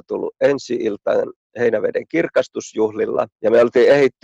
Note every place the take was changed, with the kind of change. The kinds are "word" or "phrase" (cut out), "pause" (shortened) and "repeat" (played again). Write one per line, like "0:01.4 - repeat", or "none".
0:03.3 - pause